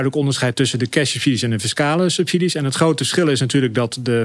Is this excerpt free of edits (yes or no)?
yes